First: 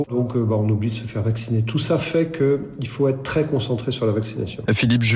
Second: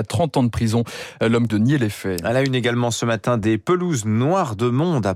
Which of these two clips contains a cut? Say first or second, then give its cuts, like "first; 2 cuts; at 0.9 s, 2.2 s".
second; 1 cut; at 1.5 s